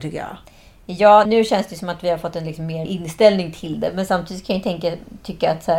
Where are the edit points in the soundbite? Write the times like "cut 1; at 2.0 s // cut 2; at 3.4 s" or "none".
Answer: cut 1; at 1.3 s // cut 2; at 2.9 s